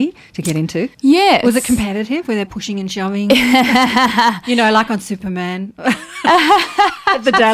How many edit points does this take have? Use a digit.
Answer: 2